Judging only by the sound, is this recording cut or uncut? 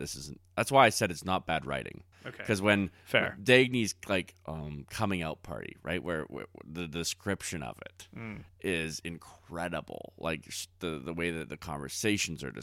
cut